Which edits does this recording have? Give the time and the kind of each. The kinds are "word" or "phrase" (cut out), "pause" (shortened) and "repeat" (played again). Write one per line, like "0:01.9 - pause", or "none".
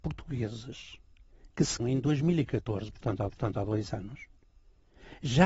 0:01.8 - word
0:03.3 - repeat